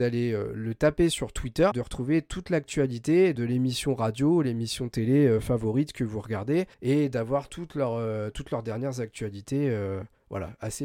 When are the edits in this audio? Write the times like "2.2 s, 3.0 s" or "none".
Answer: 1.7 s, 3.3 s, 6.7 s